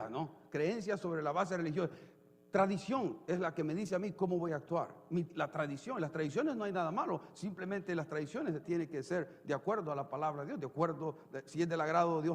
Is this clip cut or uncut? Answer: cut